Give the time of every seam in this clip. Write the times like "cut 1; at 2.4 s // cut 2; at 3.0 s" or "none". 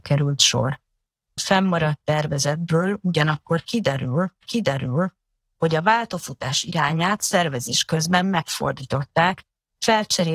cut 1; at 1.4 s // cut 2; at 4.4 s